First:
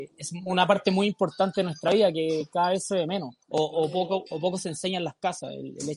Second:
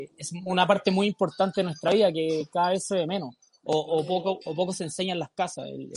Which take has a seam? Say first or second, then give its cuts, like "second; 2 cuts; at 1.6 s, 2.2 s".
first; 1 cut; at 3.4 s